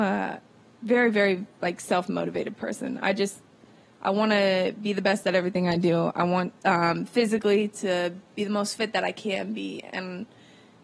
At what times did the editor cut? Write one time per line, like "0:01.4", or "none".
0:06.6